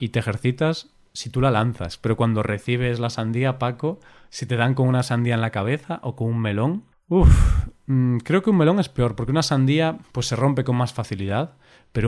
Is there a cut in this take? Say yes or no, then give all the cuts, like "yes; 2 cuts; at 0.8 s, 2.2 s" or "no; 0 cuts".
no; 0 cuts